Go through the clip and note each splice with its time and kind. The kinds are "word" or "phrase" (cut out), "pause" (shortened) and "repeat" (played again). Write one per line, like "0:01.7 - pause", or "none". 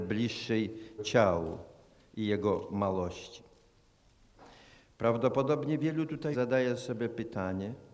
0:01.0 - word
0:06.3 - word